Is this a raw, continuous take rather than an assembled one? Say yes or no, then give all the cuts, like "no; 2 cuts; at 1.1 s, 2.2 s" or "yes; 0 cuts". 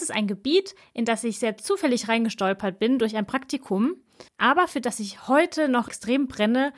no; 1 cut; at 4.3 s